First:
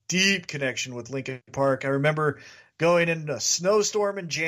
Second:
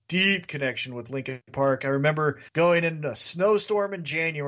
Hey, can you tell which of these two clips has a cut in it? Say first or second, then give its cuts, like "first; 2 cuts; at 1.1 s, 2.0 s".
second; 1 cut; at 2.5 s